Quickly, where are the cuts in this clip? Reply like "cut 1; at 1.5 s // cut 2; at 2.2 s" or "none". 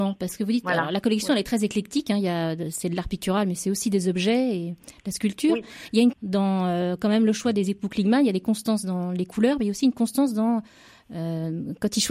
cut 1; at 6.1 s